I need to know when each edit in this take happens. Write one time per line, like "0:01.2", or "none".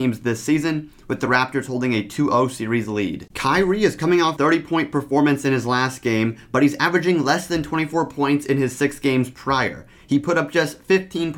0:04.4